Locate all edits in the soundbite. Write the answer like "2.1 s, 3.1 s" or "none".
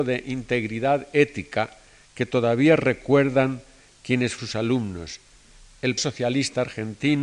4.4 s, 6.0 s